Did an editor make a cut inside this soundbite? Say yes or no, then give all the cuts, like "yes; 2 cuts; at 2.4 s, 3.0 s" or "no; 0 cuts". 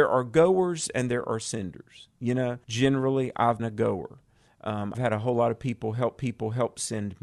yes; 4 cuts; at 2.6 s, 3.6 s, 4.9 s, 6.2 s